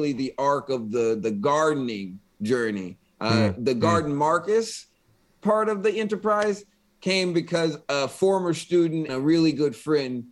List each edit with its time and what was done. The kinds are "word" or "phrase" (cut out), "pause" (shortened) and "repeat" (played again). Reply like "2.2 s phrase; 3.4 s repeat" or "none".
9.1 s word